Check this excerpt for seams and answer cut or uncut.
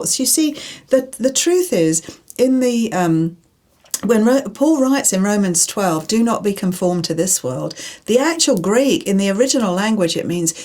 uncut